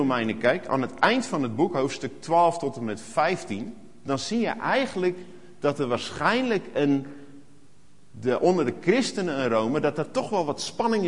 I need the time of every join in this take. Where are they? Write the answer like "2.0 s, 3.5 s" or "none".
none